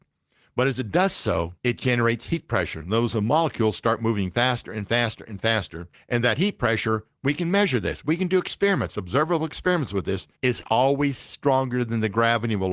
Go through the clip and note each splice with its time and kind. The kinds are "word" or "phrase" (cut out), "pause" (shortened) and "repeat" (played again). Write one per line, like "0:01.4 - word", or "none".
0:01.6 - pause
0:05.9 - pause
0:10.4 - pause